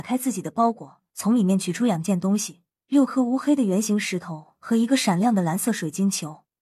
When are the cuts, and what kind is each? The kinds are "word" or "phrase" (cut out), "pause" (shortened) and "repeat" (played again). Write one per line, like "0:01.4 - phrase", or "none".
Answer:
0:01.1 - pause
0:02.7 - pause